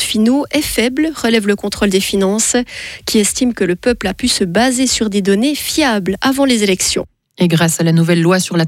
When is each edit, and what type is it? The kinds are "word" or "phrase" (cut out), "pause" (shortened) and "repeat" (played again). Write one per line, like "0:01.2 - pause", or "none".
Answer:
none